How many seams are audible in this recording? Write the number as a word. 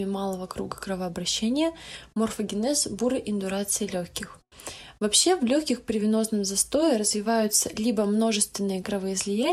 zero